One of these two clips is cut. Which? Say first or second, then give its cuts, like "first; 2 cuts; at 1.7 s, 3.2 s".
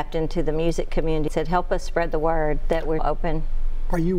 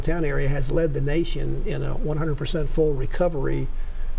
first; 2 cuts; at 1.3 s, 3.0 s